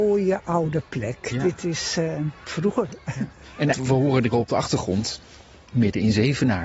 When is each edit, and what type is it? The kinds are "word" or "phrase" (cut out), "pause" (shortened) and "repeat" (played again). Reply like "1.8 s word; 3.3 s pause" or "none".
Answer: 2.5 s phrase; 3.7 s phrase; 4.3 s word